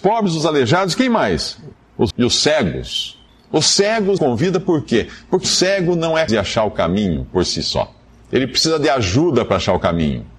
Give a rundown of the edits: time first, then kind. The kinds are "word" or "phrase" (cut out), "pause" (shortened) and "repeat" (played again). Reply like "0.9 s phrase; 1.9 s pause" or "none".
2.1 s word; 4.2 s word; 5.4 s word; 6.3 s word